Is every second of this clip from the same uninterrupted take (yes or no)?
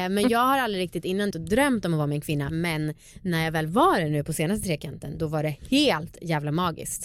no